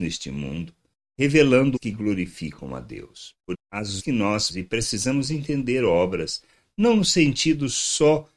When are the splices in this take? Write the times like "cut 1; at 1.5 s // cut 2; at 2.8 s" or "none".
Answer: cut 1; at 1.8 s // cut 2; at 3.5 s // cut 3; at 4.0 s // cut 4; at 4.5 s